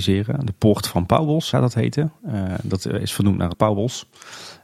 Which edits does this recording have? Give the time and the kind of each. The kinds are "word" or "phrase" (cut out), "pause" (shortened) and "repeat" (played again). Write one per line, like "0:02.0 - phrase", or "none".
0:01.5 - word
0:03.5 - word